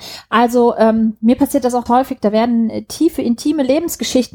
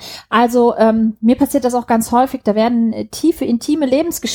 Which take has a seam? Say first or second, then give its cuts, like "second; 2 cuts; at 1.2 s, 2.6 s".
first; 1 cut; at 1.9 s